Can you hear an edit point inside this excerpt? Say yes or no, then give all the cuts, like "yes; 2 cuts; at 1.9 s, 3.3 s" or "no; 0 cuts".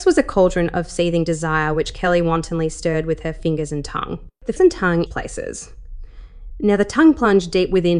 yes; 2 cuts; at 4.6 s, 5.1 s